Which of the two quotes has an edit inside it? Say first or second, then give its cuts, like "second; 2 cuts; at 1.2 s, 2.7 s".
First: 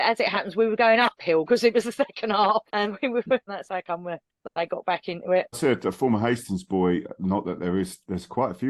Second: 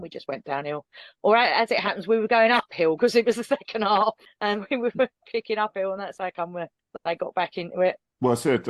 first; 3 cuts; at 2.7 s, 3.5 s, 5.5 s